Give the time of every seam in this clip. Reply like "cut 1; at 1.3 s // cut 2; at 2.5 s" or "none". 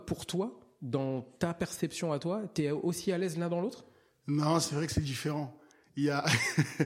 none